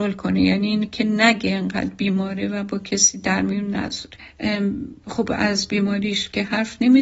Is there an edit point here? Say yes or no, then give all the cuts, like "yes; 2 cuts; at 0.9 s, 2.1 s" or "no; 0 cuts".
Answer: no; 0 cuts